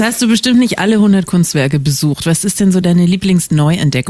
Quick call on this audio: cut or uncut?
uncut